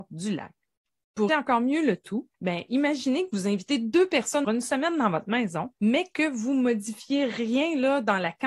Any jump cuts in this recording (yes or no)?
yes